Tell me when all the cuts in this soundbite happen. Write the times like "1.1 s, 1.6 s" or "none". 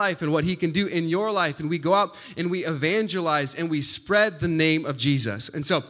none